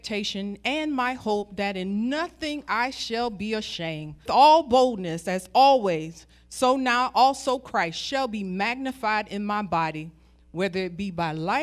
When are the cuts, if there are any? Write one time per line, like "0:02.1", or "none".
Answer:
0:04.3